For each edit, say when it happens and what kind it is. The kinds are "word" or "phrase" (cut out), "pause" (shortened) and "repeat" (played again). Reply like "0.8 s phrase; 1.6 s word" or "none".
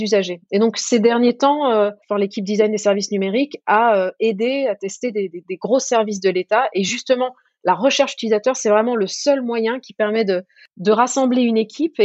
2.0 s pause